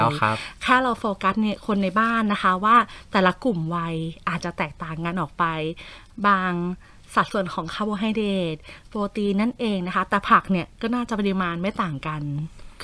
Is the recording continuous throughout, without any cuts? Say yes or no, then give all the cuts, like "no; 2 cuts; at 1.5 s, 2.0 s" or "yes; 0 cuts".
yes; 0 cuts